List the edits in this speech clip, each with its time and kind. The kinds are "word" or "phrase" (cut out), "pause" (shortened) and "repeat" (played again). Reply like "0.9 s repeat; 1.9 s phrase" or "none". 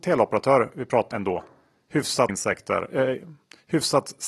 1.1 s word; 2.3 s word